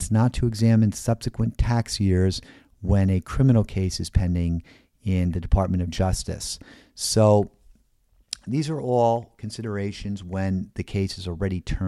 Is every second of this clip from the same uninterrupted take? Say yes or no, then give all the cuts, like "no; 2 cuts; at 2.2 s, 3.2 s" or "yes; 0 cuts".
yes; 0 cuts